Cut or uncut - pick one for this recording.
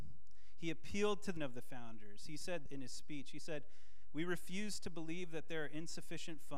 cut